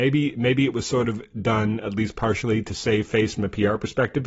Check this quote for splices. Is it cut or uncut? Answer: uncut